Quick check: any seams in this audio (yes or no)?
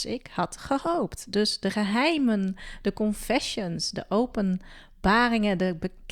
no